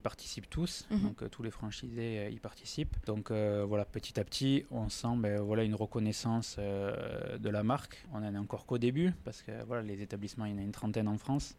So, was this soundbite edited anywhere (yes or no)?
no